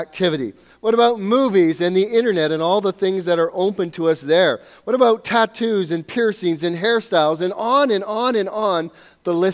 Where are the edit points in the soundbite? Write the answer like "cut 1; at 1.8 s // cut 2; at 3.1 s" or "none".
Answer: none